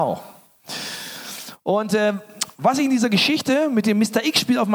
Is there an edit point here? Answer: no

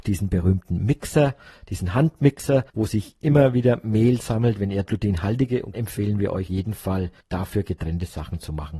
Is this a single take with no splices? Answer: no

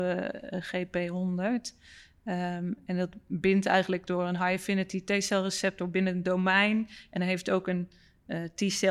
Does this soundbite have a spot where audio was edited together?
no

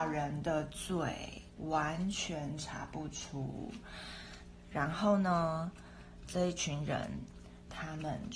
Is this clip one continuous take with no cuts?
no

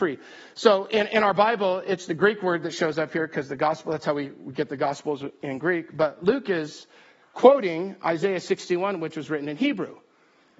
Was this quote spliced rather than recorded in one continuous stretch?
no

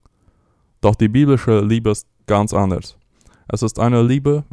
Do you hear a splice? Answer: no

